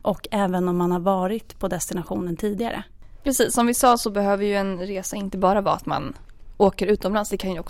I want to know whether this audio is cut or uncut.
cut